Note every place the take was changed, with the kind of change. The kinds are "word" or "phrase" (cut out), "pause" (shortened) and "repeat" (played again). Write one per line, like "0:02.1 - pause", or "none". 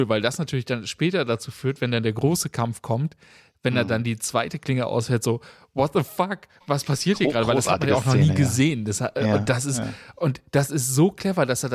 none